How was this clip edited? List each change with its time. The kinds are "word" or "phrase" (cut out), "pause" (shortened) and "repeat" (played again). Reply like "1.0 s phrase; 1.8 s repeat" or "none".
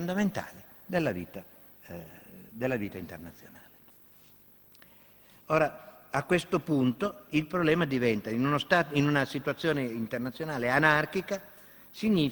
none